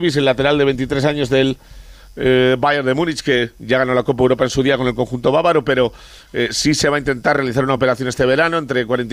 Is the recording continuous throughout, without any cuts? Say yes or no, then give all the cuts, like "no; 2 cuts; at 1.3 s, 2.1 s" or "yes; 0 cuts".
yes; 0 cuts